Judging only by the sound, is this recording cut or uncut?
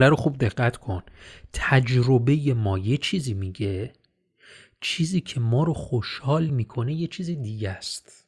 uncut